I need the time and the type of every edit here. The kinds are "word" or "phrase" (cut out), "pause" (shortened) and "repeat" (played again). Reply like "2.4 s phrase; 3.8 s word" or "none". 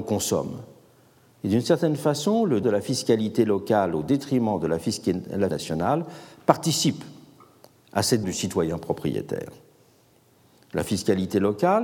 2.6 s word; 5.5 s word; 8.2 s word